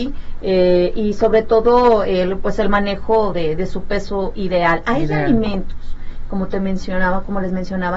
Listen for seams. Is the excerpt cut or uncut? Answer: uncut